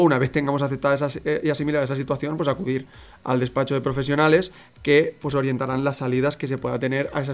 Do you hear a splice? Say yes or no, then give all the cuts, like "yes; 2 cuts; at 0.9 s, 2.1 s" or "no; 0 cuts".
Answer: no; 0 cuts